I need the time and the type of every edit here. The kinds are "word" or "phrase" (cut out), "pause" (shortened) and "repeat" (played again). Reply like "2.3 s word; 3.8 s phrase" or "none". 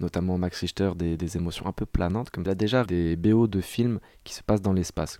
1.2 s word; 2.5 s phrase; 2.9 s word